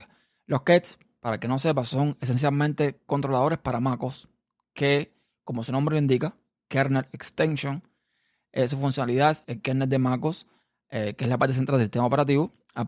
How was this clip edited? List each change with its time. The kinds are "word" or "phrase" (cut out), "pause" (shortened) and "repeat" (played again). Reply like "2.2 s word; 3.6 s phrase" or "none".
9.4 s word